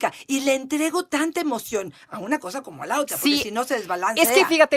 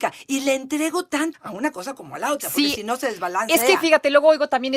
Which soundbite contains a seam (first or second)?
second